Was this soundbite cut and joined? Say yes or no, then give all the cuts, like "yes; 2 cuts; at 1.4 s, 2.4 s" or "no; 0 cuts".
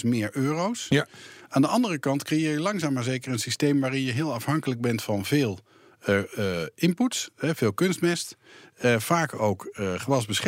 no; 0 cuts